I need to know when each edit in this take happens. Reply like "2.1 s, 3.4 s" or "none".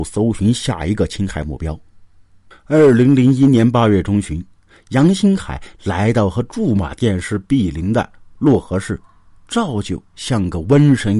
none